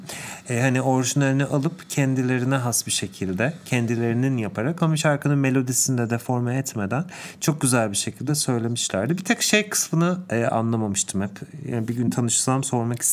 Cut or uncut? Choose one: uncut